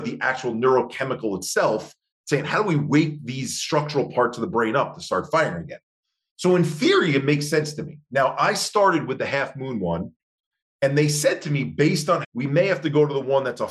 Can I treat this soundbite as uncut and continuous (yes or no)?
no